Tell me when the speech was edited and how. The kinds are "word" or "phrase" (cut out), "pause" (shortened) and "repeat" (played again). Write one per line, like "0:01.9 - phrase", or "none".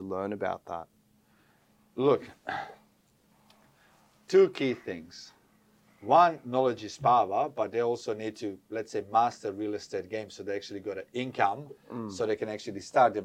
none